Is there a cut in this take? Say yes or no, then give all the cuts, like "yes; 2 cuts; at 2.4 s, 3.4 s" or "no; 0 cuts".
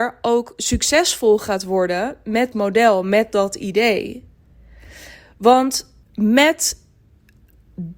yes; 2 cuts; at 2.5 s, 6.0 s